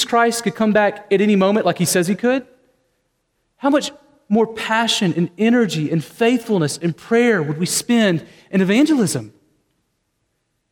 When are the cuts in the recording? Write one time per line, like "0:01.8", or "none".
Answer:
none